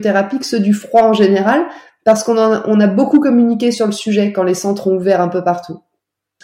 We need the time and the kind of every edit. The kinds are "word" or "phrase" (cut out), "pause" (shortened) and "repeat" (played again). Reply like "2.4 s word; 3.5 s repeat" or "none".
none